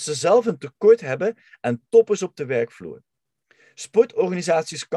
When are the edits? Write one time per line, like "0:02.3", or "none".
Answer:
none